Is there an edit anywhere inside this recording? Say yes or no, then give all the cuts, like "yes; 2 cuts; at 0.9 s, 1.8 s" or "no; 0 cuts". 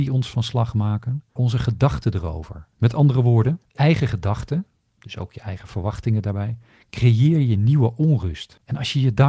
yes; 3 cuts; at 1.4 s, 2.7 s, 3.8 s